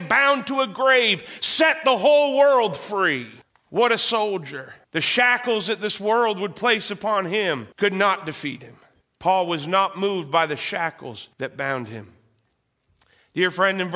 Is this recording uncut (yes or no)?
no